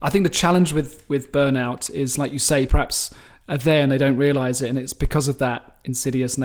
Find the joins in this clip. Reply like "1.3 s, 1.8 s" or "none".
2.7 s